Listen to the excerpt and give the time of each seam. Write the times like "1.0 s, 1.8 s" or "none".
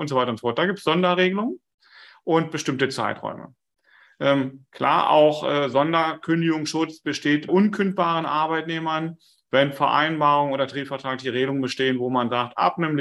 7.5 s